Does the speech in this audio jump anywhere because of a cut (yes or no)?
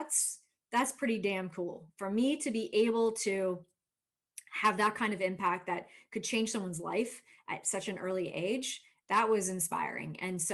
no